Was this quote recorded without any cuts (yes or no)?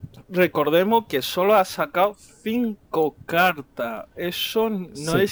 yes